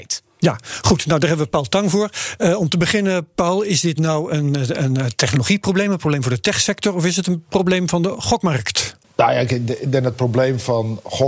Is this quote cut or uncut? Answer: uncut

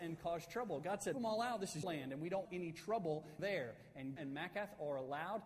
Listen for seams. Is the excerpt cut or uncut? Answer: cut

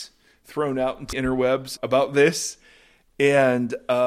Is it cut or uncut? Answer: cut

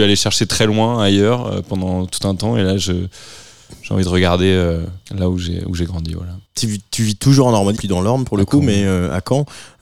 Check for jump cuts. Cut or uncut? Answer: cut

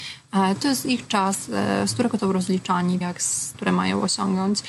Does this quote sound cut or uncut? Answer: cut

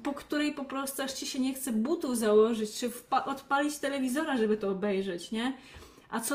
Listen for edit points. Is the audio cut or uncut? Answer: uncut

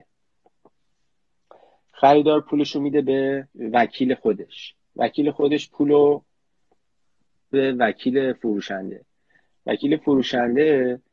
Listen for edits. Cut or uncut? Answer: cut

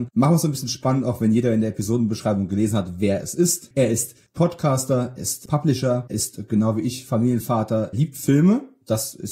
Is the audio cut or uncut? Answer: cut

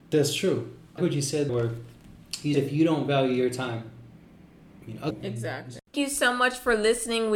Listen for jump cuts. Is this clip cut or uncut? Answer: cut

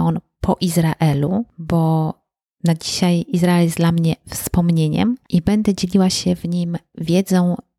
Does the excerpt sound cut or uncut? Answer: uncut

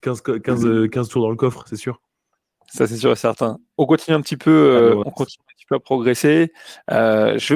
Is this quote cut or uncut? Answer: uncut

